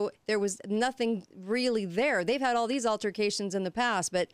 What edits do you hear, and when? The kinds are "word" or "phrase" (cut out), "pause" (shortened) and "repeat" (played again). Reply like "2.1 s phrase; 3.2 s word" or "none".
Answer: none